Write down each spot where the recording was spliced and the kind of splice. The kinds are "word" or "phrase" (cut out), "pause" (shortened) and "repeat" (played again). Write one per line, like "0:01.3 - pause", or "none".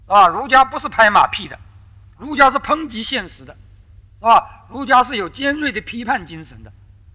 0:02.2 - word